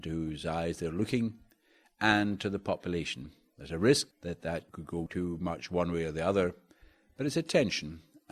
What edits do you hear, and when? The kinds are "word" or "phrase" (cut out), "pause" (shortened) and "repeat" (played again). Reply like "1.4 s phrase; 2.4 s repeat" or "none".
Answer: 4.1 s pause

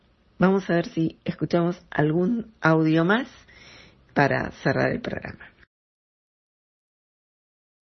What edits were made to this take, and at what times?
none

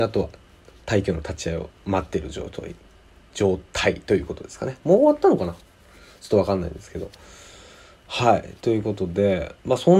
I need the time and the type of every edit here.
none

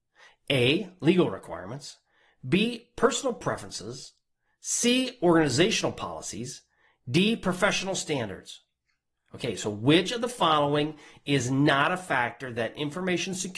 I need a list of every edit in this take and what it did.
none

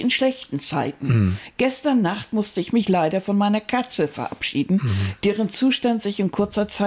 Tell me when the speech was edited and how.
none

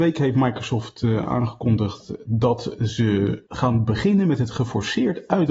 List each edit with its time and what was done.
3.5 s pause

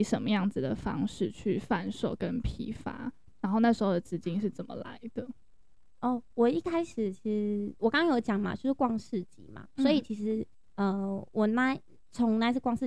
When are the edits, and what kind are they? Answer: 7.8 s pause

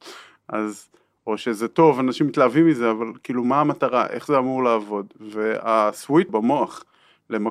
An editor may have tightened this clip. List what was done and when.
6.3 s word

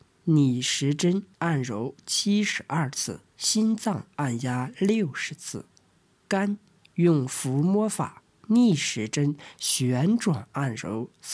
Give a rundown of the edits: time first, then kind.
1.3 s pause; 3.3 s pause

